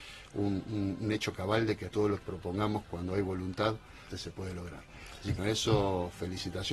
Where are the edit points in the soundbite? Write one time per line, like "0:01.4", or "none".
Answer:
0:01.9
0:02.2
0:02.9
0:04.1
0:05.4